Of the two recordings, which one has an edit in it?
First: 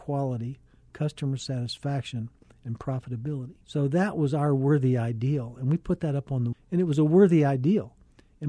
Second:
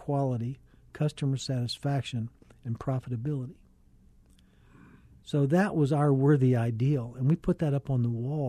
first; 2 cuts; at 3.6 s, 6.5 s

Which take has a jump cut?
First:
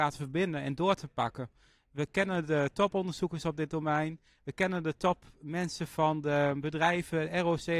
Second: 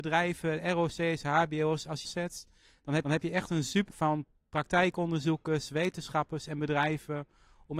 second; 3 cuts; at 2.0 s, 3.0 s, 3.9 s

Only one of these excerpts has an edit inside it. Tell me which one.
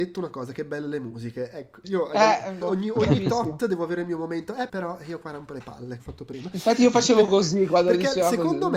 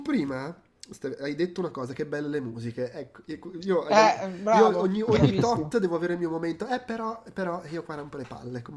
first; 4 cuts; at 1.8 s, 2.6 s, 4.7 s, 6.0 s

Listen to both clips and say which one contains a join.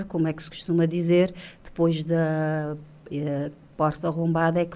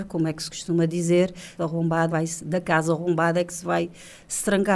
second; 2 cuts; at 1.6 s, 2.1 s

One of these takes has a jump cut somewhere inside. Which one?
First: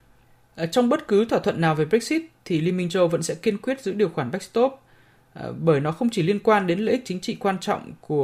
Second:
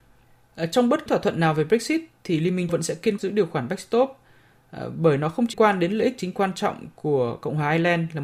second; 5 cuts; at 1.1 s, 2.7 s, 3.2 s, 5.5 s, 6.3 s

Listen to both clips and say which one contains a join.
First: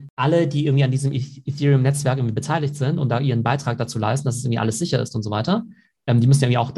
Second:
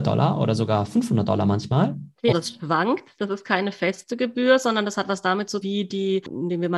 second; 2 cuts; at 2.3 s, 5.6 s

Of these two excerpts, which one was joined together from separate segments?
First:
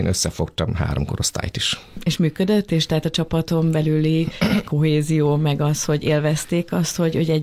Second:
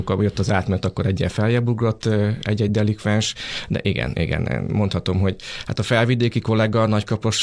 first; 1 cut; at 4.6 s

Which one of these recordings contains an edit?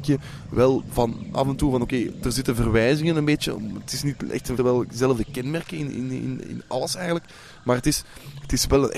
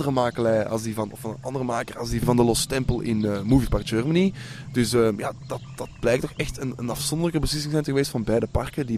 first; 1 cut; at 4.6 s

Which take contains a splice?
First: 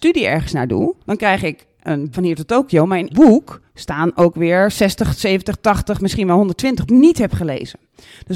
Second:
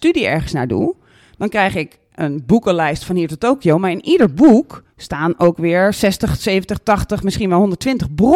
first; 4 cuts; at 1.0 s, 2.1 s, 3.1 s, 6.9 s

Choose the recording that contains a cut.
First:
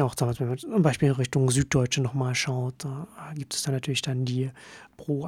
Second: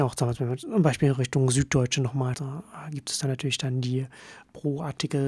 second; 1 cut; at 2.3 s

